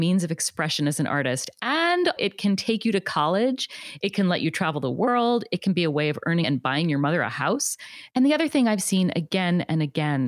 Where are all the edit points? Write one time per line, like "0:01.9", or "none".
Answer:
0:02.2
0:06.4